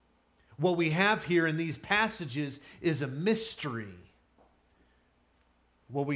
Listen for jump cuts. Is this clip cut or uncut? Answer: uncut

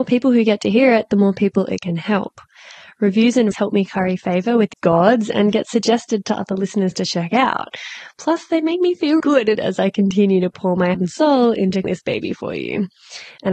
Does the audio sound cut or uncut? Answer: cut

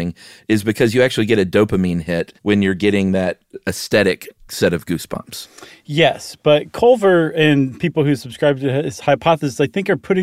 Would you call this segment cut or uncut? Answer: cut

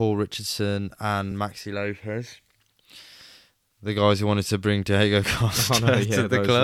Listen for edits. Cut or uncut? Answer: uncut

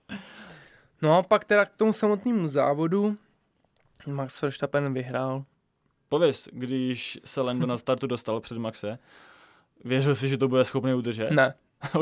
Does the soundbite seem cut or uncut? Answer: uncut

